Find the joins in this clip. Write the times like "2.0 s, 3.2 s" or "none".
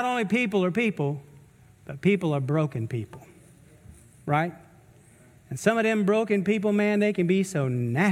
none